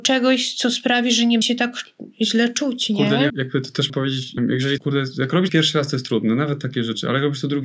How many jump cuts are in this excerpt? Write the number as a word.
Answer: six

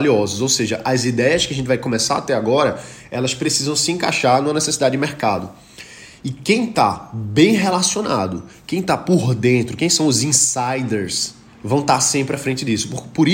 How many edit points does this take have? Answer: one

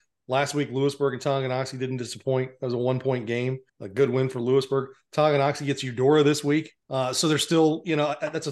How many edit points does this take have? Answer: two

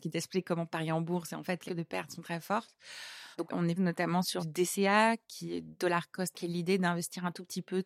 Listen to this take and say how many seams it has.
six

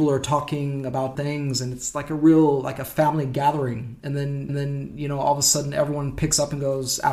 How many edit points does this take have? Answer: two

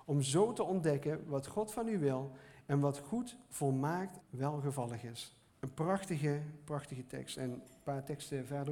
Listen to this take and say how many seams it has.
two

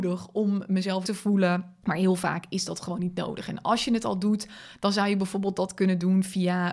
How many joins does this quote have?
one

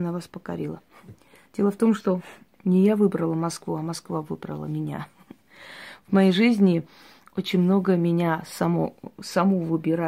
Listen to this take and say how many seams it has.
zero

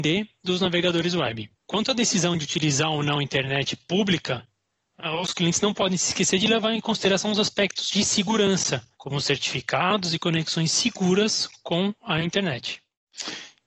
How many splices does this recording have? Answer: two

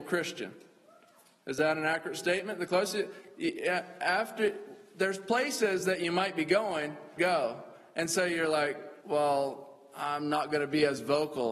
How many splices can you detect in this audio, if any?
two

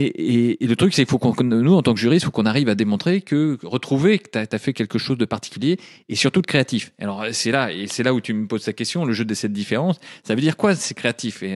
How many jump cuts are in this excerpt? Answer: zero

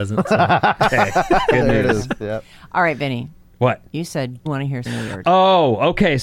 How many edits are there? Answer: three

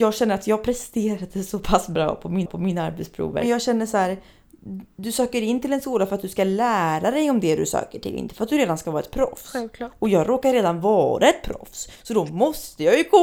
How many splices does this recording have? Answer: two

